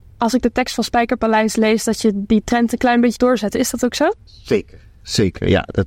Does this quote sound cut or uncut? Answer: cut